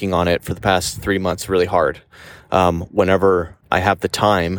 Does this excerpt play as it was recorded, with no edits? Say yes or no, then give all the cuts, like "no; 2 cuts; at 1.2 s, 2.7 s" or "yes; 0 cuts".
no; 1 cut; at 3.6 s